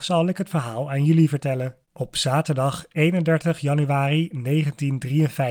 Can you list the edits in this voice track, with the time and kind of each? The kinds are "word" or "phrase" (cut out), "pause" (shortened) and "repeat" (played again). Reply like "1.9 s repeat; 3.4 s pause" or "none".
1.8 s pause